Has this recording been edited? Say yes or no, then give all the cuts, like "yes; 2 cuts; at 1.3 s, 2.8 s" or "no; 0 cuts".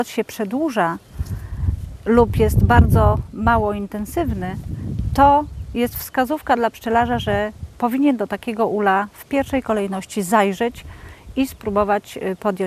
no; 0 cuts